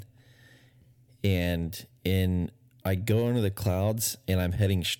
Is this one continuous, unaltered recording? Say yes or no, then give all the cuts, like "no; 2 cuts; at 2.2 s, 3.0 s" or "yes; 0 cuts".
no; 1 cut; at 2.7 s